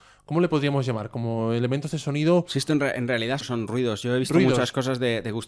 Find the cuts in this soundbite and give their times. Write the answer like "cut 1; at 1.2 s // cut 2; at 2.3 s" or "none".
cut 1; at 3.4 s